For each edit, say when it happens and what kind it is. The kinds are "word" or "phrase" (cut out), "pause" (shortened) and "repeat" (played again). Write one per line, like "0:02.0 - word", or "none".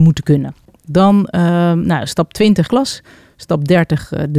0:02.7 - phrase